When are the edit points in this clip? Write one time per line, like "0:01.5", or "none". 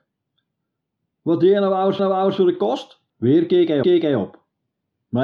0:02.0
0:03.1
0:03.8

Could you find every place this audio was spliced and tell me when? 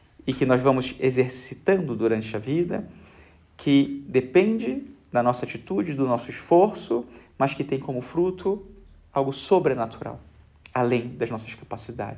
none

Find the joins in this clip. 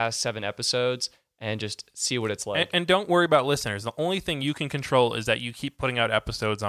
none

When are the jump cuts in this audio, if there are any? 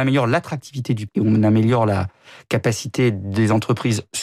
0:01.1

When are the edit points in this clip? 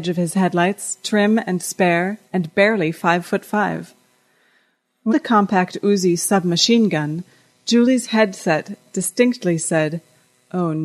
0:02.2
0:05.1

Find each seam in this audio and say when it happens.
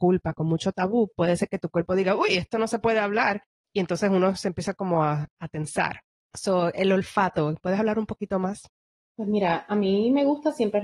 none

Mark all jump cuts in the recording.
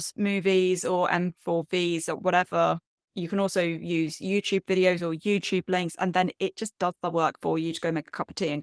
none

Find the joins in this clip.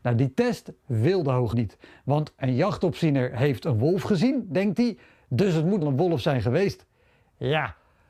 0:01.5
0:05.8

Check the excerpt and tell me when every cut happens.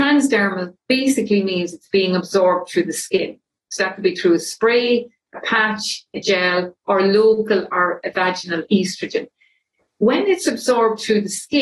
none

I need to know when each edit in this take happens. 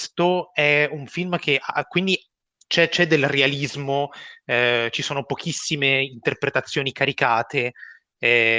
none

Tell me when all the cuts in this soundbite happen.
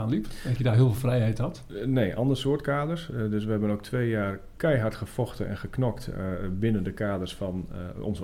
none

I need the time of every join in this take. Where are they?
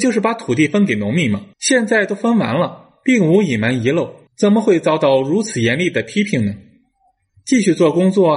0:01.5
0:04.3

